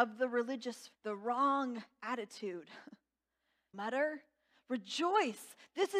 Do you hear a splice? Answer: yes; 2 cuts; at 0.9 s, 3.7 s

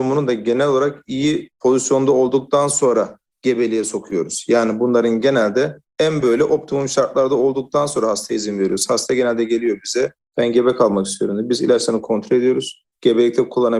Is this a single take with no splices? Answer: yes; 0 cuts

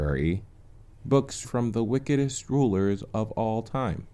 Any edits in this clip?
yes; 1 cut; at 1.4 s

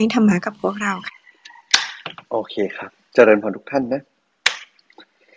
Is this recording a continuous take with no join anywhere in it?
no; 1 cut; at 3.1 s

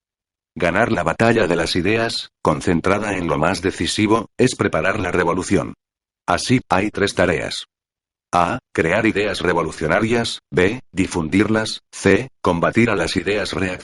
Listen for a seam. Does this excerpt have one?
yes; 1 cut; at 6.6 s

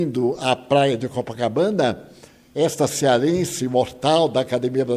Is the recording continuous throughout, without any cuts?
yes; 0 cuts

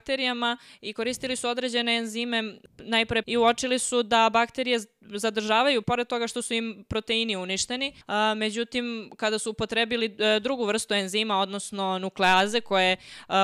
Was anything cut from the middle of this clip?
yes; 3 cuts; at 3.2 s, 5.8 s, 8.0 s

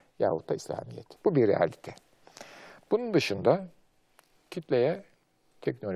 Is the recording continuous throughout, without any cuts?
no; 1 cut; at 1.2 s

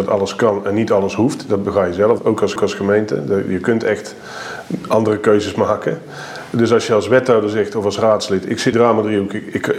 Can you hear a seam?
yes; 3 cuts; at 2.2 s, 2.6 s, 8.7 s

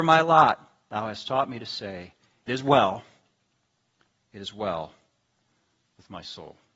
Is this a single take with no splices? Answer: no; 1 cut; at 2.5 s

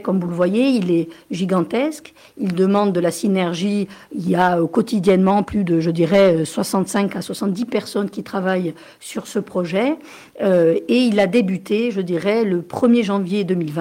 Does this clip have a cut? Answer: no; 0 cuts

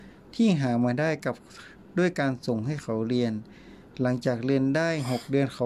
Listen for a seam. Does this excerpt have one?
no; 0 cuts

